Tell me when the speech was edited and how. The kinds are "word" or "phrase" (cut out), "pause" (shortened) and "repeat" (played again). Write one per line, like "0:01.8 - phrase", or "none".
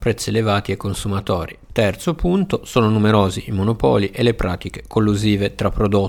none